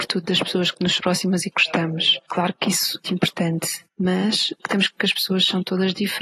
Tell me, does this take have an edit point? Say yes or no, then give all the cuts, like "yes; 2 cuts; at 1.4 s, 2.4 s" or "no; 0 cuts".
yes; 5 cuts; at 1.0 s, 1.5 s, 3.0 s, 4.6 s, 5.0 s